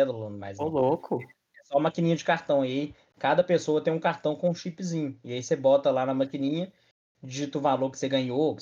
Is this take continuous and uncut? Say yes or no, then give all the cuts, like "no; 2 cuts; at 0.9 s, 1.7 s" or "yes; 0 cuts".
yes; 0 cuts